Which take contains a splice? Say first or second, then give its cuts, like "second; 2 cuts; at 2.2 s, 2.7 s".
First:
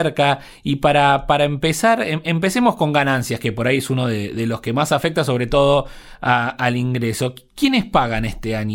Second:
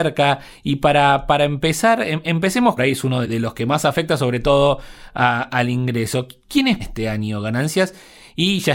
second; 3 cuts; at 2.8 s, 3.2 s, 6.8 s